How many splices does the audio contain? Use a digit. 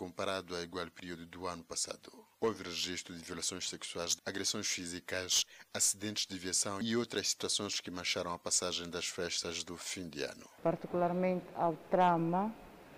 2